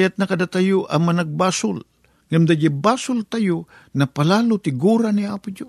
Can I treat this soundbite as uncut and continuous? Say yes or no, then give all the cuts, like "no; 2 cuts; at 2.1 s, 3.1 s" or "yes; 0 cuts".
yes; 0 cuts